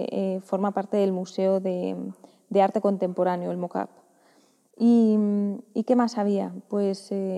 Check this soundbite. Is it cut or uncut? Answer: uncut